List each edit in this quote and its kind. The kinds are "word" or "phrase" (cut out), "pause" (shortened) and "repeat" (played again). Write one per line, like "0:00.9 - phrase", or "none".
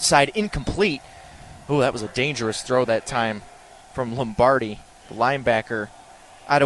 none